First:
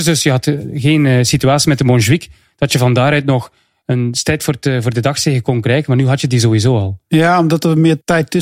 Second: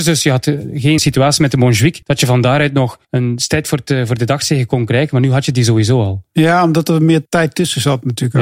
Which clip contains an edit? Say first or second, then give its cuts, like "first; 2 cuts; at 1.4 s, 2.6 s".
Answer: second; 3 cuts; at 1.0 s, 2.0 s, 3.0 s